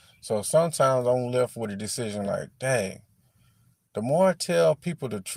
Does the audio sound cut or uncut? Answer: uncut